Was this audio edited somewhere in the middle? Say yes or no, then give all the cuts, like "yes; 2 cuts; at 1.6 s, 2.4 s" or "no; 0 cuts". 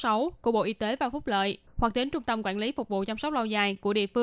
yes; 1 cut; at 1.7 s